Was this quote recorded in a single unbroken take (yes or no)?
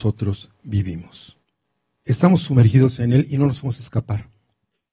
yes